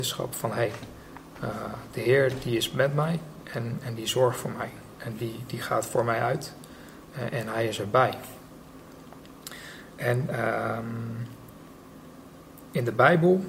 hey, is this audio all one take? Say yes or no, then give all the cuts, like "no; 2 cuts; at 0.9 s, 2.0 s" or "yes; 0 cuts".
yes; 0 cuts